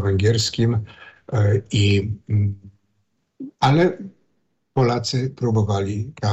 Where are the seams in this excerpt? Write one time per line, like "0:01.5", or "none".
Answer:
0:03.5